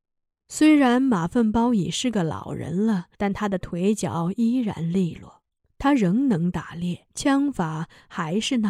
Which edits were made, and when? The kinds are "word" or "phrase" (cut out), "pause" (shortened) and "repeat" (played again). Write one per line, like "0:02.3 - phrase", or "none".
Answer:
0:03.1 - pause
0:05.6 - pause
0:07.1 - pause